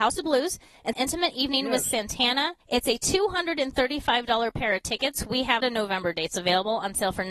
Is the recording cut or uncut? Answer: cut